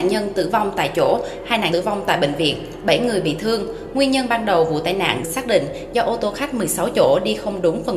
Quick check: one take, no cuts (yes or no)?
no